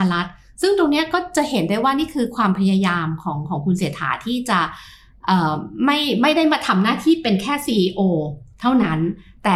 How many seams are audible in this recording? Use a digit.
0